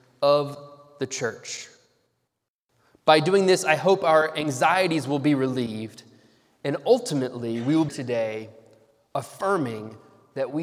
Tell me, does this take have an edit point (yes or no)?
yes